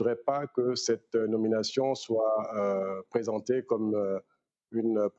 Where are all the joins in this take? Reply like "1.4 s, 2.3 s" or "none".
none

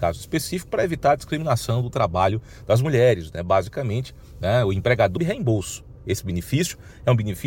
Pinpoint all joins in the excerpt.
5.2 s

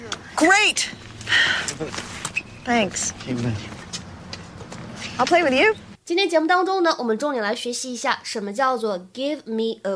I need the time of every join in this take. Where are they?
none

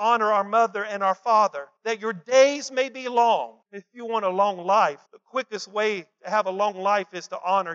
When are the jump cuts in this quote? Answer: 1.8 s, 3.6 s, 5.1 s, 6.1 s

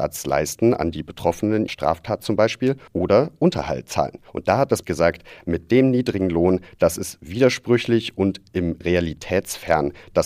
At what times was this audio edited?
1.7 s, 2.9 s, 4.3 s, 4.8 s, 5.4 s, 8.8 s

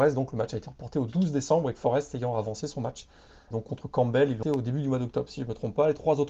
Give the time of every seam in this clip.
3.5 s, 4.4 s

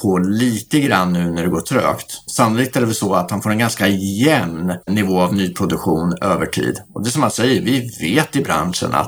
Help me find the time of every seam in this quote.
4.8 s

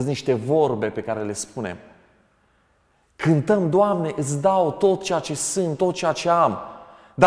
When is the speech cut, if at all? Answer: none

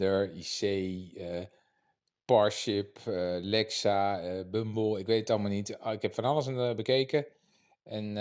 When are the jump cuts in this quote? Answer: none

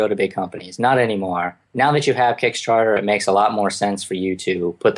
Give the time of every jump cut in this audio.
1.6 s

